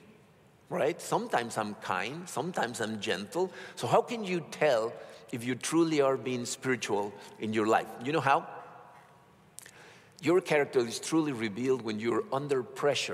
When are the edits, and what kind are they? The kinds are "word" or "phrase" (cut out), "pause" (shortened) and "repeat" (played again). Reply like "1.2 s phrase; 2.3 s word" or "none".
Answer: none